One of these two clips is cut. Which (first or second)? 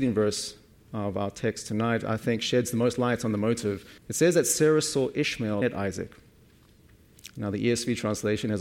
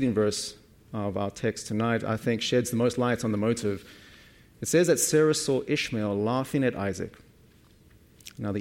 first